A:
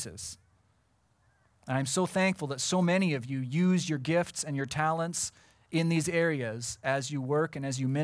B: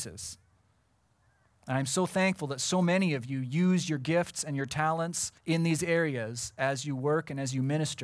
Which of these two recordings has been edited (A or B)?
B